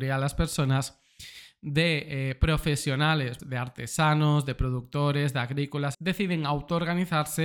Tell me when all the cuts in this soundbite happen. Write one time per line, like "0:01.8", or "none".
0:03.4
0:05.9